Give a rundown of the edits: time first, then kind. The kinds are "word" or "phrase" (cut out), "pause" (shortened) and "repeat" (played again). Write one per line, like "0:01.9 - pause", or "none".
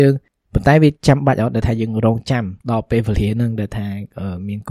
0:01.0 - pause
0:02.6 - pause